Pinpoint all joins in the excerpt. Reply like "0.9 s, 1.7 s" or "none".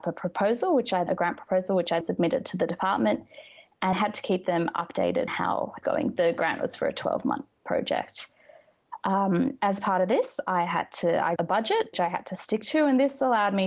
1.1 s, 2.0 s, 3.9 s, 5.3 s, 5.8 s, 11.4 s, 11.9 s